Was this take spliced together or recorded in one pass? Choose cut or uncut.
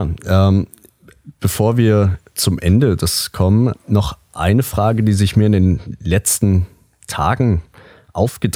cut